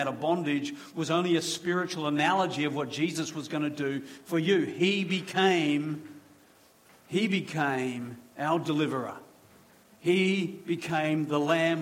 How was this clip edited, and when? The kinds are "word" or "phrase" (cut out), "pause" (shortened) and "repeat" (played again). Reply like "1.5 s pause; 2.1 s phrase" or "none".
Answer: none